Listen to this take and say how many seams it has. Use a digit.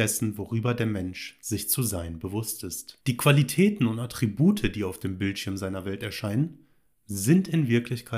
1